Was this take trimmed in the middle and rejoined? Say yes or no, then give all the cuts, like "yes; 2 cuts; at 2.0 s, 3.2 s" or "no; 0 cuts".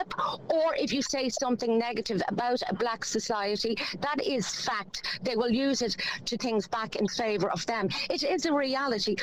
yes; 1 cut; at 6.4 s